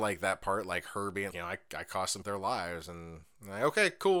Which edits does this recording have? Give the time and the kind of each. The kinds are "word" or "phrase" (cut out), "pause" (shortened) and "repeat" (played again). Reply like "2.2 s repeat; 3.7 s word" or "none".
1.3 s word; 2.2 s word